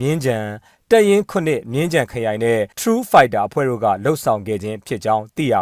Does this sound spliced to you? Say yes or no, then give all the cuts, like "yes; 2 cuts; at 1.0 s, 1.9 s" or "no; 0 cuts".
yes; 1 cut; at 2.7 s